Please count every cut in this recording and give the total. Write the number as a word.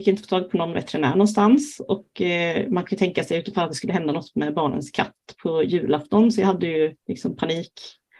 one